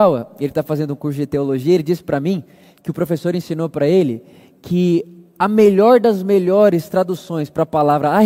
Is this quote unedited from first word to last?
yes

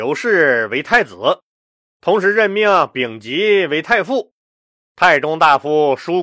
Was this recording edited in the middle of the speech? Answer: no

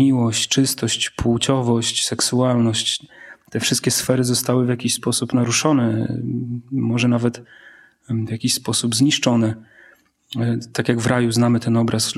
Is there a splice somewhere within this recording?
no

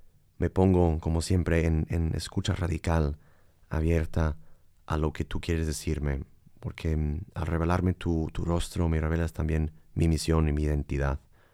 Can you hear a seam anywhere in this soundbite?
no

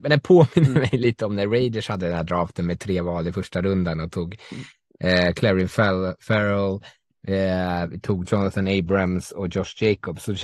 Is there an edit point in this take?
no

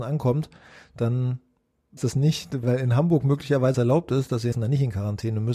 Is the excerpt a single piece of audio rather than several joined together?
no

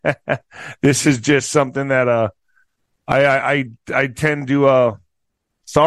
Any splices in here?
no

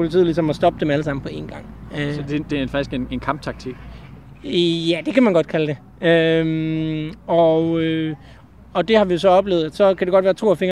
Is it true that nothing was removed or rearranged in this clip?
yes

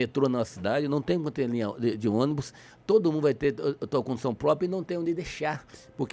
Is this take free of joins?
yes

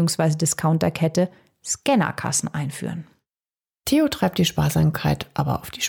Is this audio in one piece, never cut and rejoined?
yes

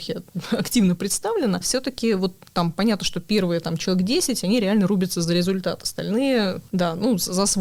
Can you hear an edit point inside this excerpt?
no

